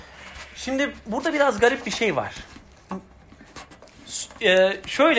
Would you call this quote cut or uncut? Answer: uncut